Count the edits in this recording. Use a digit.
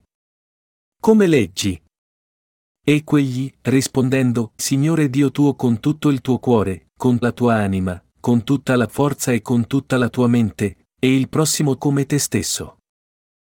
4